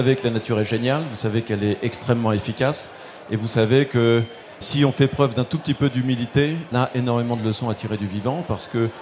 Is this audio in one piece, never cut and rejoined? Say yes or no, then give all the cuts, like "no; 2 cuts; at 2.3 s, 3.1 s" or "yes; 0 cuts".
no; 2 cuts; at 4.6 s, 6.7 s